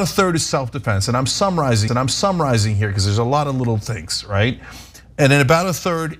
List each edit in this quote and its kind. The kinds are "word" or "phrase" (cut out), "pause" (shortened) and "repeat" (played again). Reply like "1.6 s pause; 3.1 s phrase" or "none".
1.9 s repeat